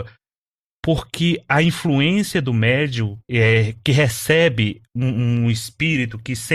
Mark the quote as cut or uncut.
cut